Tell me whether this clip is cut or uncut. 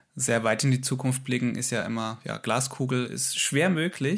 uncut